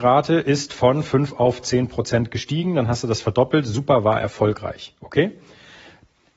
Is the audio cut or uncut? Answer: uncut